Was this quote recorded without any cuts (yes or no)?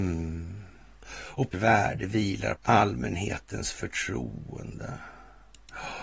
no